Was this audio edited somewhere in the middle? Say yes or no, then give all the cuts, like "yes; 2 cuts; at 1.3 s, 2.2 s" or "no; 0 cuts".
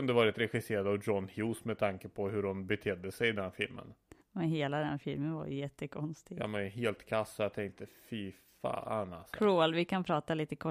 yes; 1 cut; at 4.2 s